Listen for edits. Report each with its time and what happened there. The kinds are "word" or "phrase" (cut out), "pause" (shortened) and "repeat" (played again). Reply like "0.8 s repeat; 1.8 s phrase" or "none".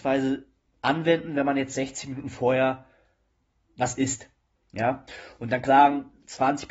5.7 s word